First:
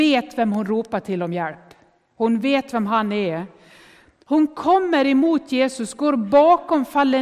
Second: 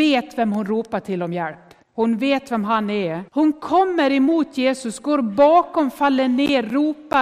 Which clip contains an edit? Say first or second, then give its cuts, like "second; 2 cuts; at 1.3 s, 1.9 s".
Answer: second; 2 cuts; at 1.8 s, 3.3 s